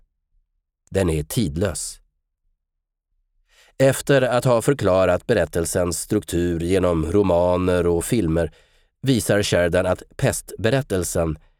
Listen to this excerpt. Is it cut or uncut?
uncut